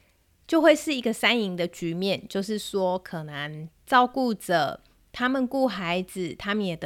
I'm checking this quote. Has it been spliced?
no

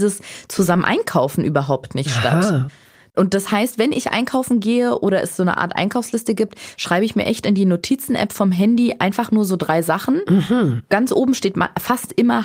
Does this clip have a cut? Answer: no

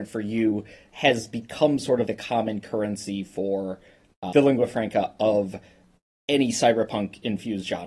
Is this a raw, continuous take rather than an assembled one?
no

